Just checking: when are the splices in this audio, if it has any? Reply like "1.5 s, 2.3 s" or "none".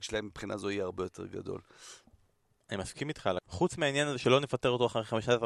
3.4 s